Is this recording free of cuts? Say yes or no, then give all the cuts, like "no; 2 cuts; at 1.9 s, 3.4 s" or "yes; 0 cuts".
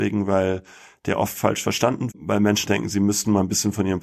no; 2 cuts; at 2.1 s, 2.7 s